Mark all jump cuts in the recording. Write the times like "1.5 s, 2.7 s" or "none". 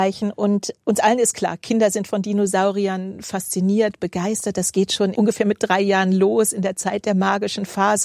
none